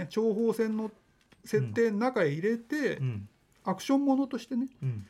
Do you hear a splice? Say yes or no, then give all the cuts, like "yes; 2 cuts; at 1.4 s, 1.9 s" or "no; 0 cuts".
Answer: no; 0 cuts